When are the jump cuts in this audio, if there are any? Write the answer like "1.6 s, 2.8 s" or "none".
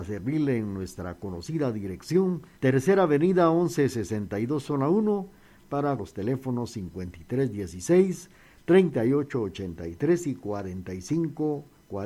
2.5 s, 6.0 s